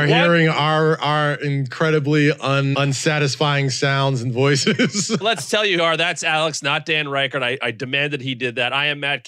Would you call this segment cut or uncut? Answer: cut